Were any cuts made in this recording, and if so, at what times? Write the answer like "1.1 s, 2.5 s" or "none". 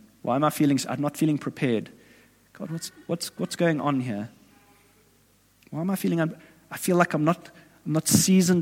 none